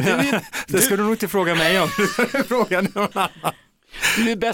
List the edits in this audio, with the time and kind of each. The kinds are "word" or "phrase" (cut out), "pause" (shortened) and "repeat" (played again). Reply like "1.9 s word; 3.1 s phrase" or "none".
none